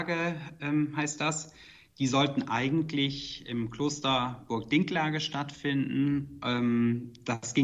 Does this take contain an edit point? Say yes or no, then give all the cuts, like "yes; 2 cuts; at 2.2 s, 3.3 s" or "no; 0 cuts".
no; 0 cuts